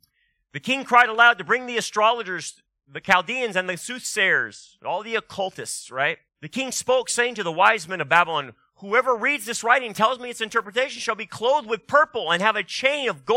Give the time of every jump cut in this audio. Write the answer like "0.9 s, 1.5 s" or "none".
6.3 s